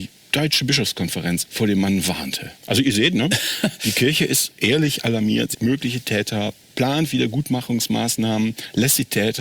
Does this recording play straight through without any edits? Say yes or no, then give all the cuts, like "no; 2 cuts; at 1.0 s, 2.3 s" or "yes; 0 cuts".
no; 3 cuts; at 1.5 s, 2.6 s, 5.5 s